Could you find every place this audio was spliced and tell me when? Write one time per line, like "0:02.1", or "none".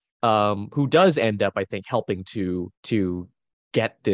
0:02.7